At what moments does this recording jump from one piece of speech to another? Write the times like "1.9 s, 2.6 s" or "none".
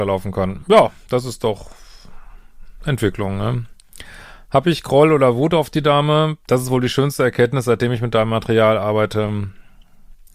6.4 s